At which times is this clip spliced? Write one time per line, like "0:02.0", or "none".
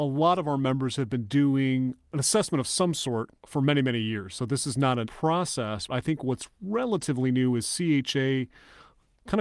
0:03.4
0:05.0
0:05.9
0:06.5